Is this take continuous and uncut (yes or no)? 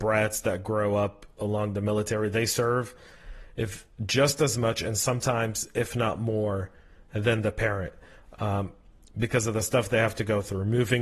yes